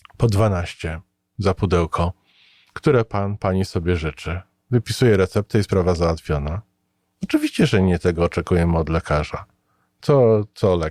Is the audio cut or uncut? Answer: uncut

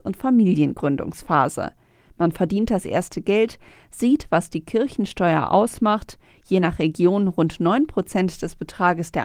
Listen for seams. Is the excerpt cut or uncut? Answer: uncut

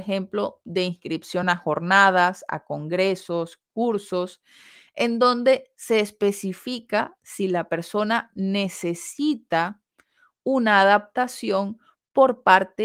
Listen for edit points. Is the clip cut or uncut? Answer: uncut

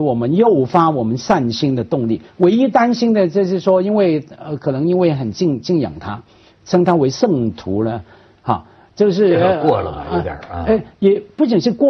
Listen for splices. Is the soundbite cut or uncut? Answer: uncut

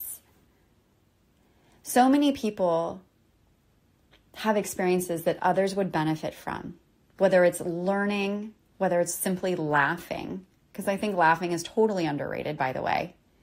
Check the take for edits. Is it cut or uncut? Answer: uncut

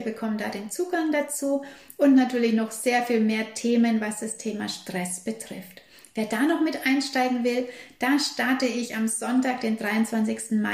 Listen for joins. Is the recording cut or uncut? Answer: uncut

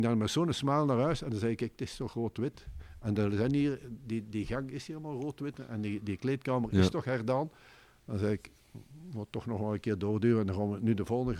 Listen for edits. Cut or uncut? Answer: uncut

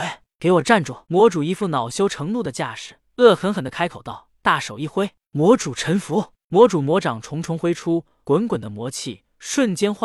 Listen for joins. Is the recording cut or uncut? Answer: cut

